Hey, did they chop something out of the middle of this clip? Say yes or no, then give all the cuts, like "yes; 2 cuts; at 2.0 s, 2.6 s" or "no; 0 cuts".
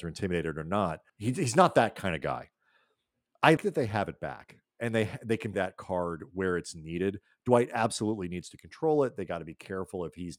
yes; 4 cuts; at 1.1 s, 3.6 s, 4.7 s, 5.5 s